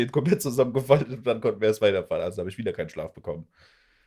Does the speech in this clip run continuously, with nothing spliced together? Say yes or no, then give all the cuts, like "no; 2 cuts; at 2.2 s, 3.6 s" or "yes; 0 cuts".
yes; 0 cuts